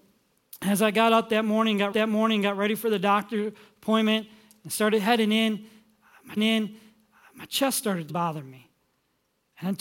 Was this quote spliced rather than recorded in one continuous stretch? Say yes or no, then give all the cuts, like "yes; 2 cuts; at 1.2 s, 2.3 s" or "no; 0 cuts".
yes; 3 cuts; at 1.9 s, 6.4 s, 8.1 s